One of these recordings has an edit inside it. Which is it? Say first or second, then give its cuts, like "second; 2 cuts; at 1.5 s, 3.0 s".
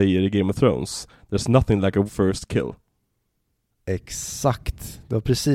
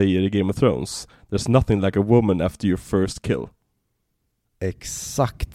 first; 1 cut; at 2.1 s